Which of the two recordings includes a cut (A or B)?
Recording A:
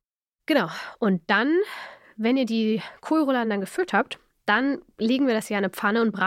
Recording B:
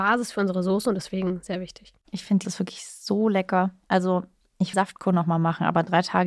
B